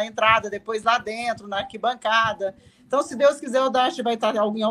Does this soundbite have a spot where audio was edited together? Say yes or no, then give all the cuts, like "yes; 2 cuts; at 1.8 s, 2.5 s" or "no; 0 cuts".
no; 0 cuts